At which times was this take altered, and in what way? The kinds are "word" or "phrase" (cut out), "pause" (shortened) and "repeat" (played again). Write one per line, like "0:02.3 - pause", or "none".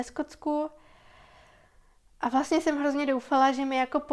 none